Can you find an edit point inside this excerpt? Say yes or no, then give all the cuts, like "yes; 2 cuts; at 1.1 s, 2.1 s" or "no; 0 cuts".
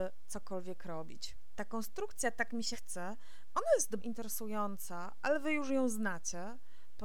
yes; 2 cuts; at 2.7 s, 4.0 s